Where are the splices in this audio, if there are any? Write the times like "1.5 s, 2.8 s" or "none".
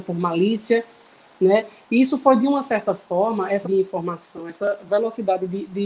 3.6 s